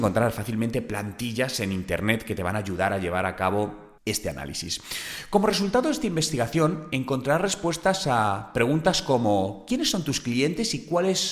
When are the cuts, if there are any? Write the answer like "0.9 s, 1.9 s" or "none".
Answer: 4.0 s